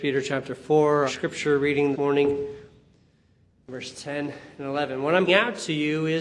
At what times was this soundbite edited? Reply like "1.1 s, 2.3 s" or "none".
1.1 s, 1.9 s, 5.3 s